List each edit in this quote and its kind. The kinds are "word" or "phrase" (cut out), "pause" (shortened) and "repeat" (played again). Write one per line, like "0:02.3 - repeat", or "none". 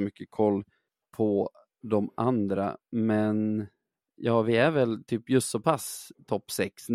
none